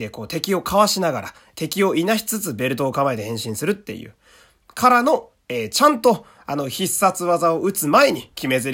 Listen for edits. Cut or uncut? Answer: uncut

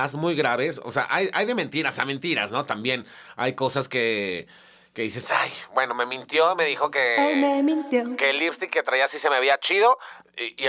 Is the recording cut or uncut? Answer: uncut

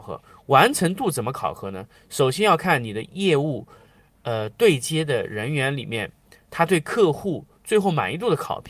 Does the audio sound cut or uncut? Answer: uncut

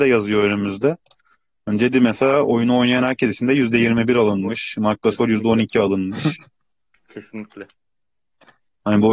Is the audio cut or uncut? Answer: uncut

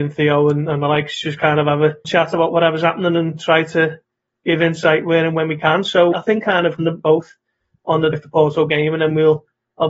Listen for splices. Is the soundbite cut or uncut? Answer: cut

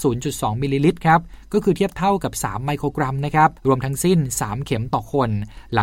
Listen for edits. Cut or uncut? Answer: cut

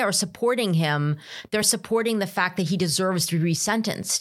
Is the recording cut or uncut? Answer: uncut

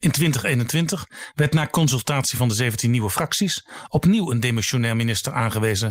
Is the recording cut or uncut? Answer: uncut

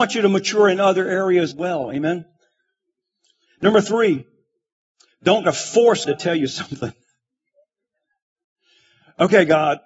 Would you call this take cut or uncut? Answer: cut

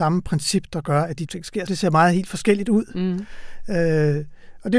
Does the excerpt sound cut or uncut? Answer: cut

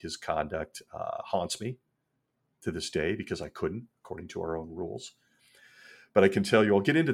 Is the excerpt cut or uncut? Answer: uncut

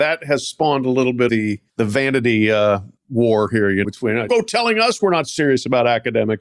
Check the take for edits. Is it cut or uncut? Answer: cut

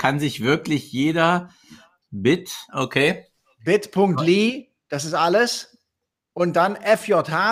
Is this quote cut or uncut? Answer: uncut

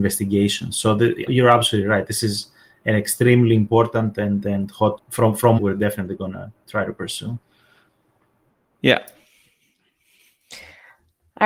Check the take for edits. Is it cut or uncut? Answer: cut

